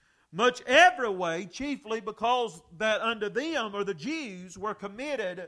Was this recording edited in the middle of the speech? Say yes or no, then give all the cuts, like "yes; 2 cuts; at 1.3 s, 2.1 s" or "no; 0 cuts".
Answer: no; 0 cuts